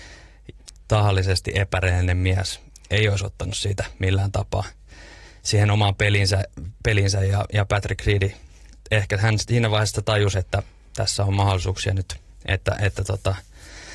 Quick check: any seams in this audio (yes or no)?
no